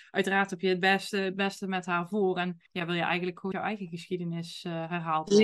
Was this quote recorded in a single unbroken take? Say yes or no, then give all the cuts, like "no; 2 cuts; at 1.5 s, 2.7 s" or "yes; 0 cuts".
no; 2 cuts; at 2.7 s, 3.5 s